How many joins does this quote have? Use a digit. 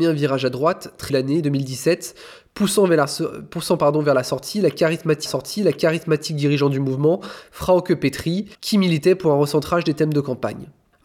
3